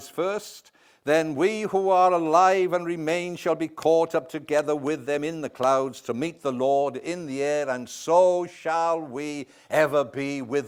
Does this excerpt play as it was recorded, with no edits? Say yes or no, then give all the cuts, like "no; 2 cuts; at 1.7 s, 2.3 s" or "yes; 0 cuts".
yes; 0 cuts